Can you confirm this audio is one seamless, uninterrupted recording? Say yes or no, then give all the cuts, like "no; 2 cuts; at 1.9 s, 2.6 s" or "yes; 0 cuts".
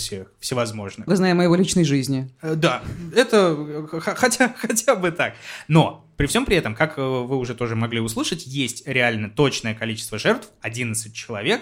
no; 1 cut; at 1.1 s